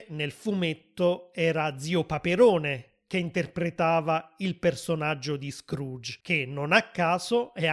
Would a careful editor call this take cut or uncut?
cut